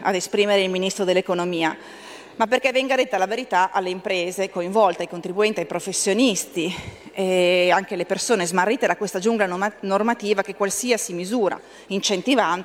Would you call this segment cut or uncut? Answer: uncut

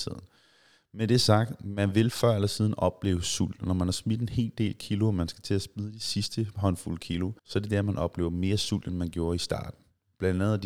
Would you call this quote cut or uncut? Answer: cut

